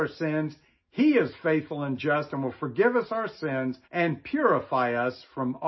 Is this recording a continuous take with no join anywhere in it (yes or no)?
no